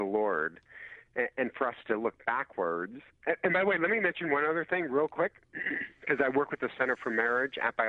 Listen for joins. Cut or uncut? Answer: uncut